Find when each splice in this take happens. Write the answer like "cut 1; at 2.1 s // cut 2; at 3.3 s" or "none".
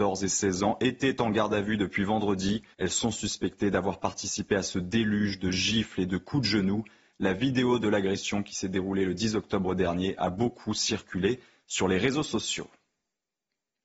cut 1; at 2.7 s